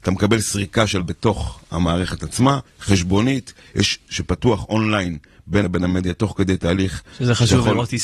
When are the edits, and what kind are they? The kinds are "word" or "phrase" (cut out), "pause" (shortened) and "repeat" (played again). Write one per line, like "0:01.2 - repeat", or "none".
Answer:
0:01.0 - word
0:02.7 - phrase
0:04.1 - word
0:05.6 - word